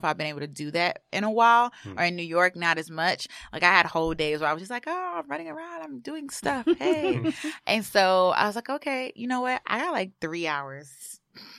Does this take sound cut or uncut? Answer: uncut